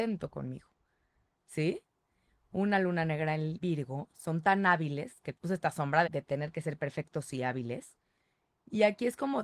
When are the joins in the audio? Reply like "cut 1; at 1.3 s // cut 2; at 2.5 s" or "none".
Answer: cut 1; at 3.6 s // cut 2; at 5.3 s // cut 3; at 6.0 s